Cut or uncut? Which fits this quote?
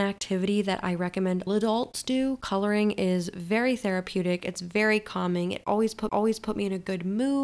cut